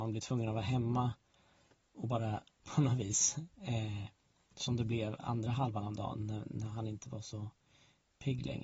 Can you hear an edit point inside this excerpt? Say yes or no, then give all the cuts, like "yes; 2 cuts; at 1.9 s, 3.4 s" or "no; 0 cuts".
yes; 1 cut; at 2.6 s